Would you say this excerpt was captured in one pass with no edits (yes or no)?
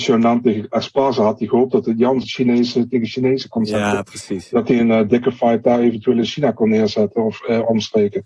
no